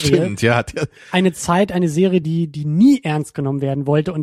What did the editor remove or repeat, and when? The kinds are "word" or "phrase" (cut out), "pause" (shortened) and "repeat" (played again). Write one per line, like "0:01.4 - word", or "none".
none